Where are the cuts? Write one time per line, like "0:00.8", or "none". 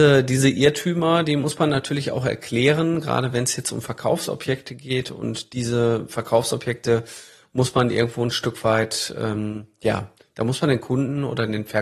none